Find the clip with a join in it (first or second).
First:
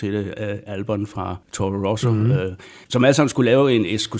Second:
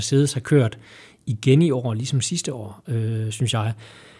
first